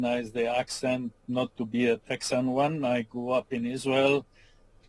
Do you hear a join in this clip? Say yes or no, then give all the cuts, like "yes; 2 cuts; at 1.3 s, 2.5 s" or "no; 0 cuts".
no; 0 cuts